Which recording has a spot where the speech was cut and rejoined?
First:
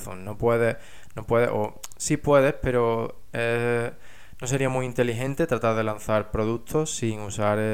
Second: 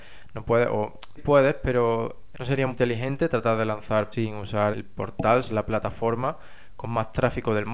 second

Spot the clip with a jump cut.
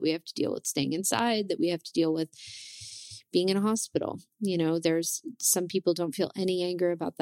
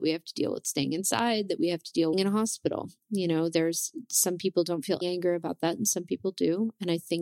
second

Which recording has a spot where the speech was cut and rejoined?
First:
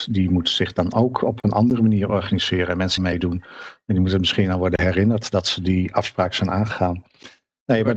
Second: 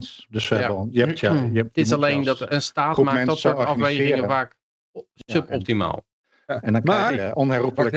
first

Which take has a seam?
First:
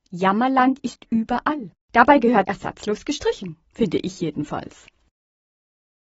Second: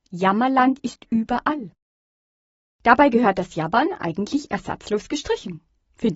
first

